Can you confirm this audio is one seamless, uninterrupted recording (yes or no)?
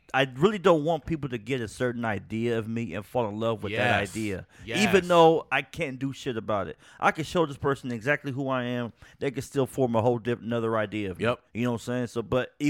no